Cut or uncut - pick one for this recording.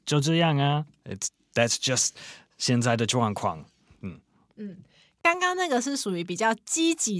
uncut